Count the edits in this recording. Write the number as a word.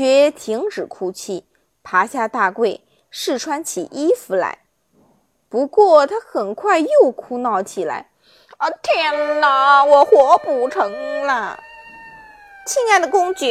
zero